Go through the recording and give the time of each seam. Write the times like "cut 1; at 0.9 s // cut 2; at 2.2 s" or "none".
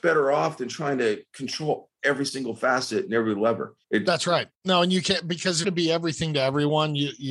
cut 1; at 3.8 s // cut 2; at 4.5 s // cut 3; at 5.6 s